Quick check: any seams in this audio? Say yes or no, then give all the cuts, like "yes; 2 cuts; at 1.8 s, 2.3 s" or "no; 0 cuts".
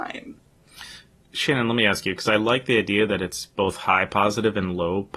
no; 0 cuts